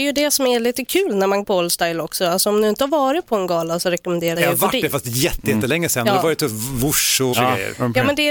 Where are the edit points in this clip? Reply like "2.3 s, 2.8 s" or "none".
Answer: 1.4 s, 4.3 s, 7.3 s